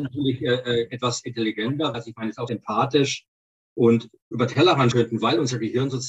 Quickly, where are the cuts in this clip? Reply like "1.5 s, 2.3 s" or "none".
1.9 s, 2.5 s, 4.9 s